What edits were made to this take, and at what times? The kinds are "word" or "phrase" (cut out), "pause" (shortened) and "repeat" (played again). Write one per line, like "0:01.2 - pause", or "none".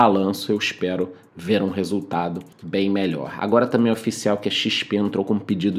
0:02.5 - pause